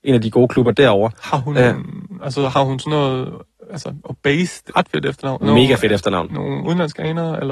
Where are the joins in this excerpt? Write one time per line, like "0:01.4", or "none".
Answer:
0:04.7
0:05.4